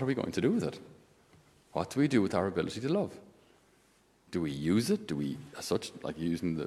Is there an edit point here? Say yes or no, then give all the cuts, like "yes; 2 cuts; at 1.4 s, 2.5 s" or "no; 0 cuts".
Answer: no; 0 cuts